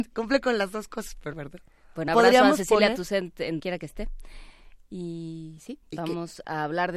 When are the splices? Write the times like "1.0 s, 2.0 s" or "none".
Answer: 1.3 s, 2.1 s, 3.6 s, 5.8 s